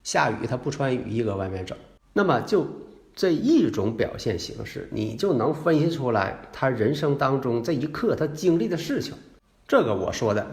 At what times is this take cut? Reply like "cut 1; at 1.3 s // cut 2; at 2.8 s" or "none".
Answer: none